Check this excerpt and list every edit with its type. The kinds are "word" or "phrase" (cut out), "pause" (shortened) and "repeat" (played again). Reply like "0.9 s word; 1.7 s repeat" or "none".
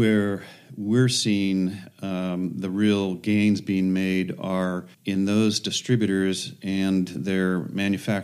4.9 s pause

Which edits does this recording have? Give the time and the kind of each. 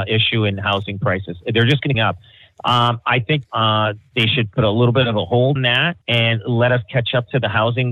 1.9 s phrase; 3.4 s word; 5.6 s word; 6.0 s pause

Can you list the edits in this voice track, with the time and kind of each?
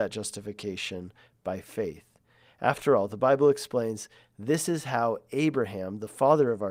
none

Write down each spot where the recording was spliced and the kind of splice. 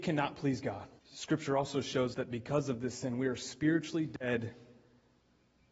1.0 s pause; 2.1 s word

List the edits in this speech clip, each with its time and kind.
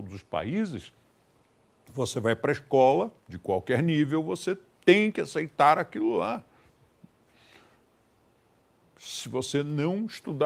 3.2 s pause

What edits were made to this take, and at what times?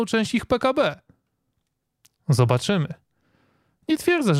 none

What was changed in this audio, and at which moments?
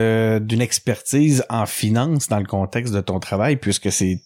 none

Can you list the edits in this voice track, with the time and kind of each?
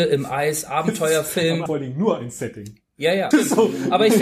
1.7 s word; 3.3 s word

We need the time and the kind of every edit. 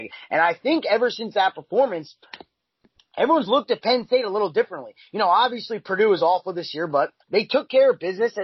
7.2 s pause

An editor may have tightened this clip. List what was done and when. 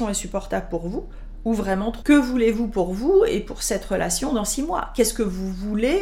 2.0 s word

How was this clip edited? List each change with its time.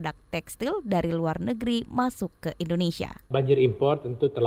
none

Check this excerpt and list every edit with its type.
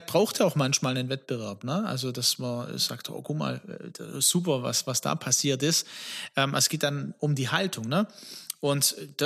none

